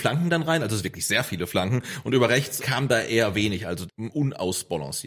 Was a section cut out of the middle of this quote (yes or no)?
yes